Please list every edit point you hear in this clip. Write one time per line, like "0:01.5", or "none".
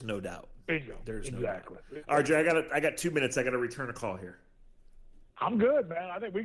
0:05.3